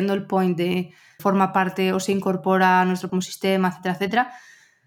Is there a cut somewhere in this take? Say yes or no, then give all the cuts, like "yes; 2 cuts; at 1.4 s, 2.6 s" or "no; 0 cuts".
yes; 2 cuts; at 1.2 s, 3.1 s